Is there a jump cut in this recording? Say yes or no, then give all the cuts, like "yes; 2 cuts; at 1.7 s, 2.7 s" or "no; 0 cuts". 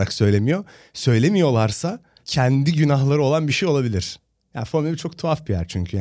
no; 0 cuts